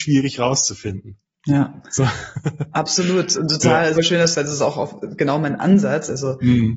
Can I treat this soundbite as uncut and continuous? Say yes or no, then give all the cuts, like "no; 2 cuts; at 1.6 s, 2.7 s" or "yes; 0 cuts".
no; 2 cuts; at 4.0 s, 4.3 s